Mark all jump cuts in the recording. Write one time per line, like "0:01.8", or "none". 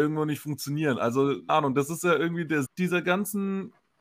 0:01.5
0:02.6